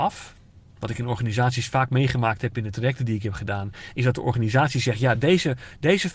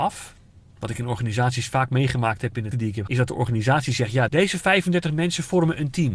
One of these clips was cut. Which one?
second; 3 cuts; at 2.7 s, 3.1 s, 4.3 s

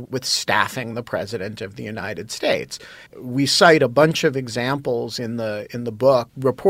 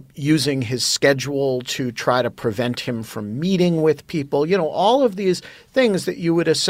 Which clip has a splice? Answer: first; 1 cut; at 3.1 s

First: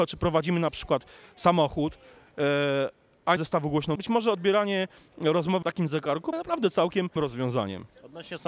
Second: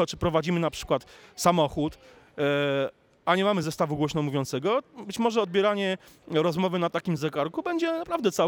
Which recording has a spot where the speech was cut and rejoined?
first; 5 cuts; at 3.4 s, 4.0 s, 5.6 s, 6.3 s, 7.2 s

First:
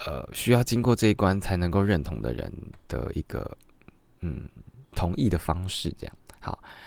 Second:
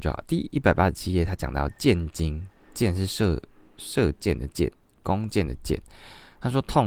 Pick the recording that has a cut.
first; 1 cut; at 4.9 s

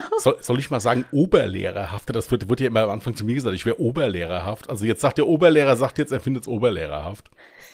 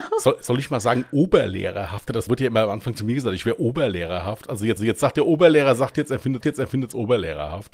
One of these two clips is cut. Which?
second; 3 cuts; at 2.3 s, 4.8 s, 6.4 s

